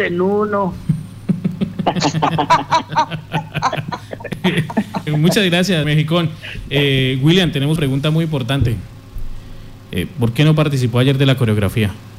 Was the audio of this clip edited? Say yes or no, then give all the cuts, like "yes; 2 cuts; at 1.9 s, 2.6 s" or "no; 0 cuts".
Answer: yes; 3 cuts; at 5.1 s, 5.8 s, 7.8 s